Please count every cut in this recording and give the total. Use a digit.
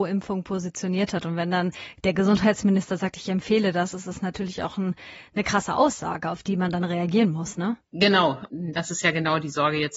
1